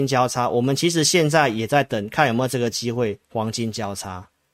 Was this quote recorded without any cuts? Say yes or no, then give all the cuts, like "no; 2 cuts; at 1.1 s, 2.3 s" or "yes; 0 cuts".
no; 1 cut; at 3.2 s